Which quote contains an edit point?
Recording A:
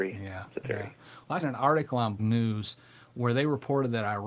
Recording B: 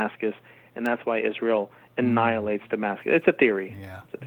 A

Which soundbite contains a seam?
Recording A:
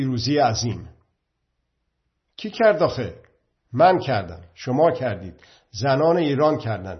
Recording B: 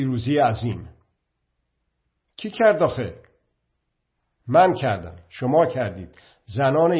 A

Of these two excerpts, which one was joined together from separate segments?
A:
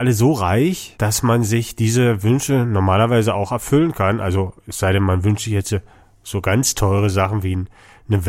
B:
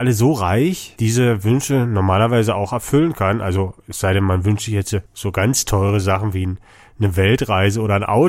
B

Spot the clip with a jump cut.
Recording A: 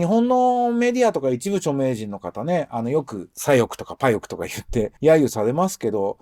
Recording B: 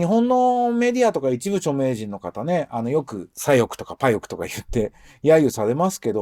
A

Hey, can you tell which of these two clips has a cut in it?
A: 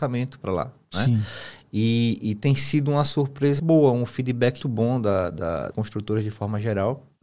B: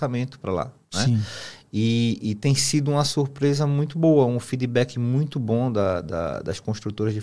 A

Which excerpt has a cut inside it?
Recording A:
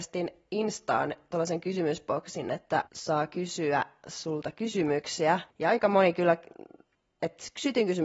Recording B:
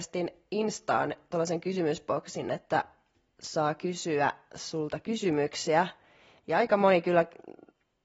A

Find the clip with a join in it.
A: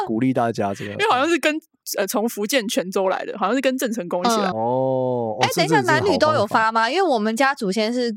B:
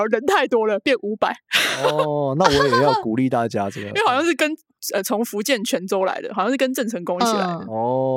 A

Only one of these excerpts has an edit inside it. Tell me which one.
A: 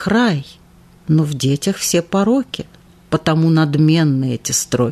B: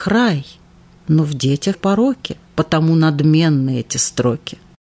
B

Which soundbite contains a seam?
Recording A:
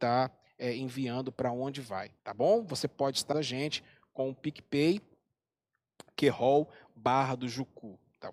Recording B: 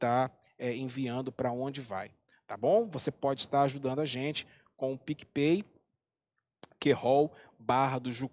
A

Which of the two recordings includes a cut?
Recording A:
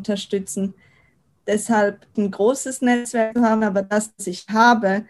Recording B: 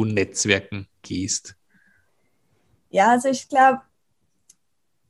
A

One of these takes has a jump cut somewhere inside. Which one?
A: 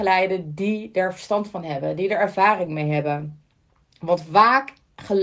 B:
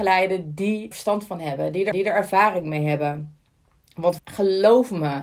B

